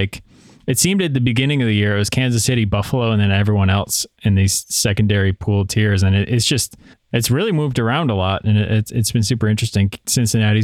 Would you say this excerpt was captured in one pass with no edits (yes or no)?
yes